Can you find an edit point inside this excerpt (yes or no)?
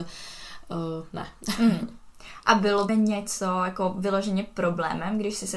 yes